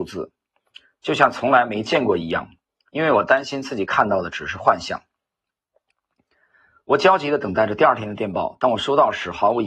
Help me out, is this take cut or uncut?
uncut